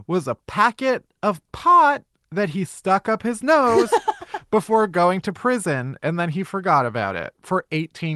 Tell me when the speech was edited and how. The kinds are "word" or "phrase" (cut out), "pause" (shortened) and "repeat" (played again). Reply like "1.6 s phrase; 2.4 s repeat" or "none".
none